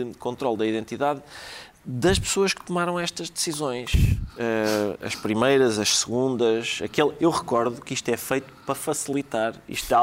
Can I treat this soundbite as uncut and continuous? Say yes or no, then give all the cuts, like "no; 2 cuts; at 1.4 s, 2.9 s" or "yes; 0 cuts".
yes; 0 cuts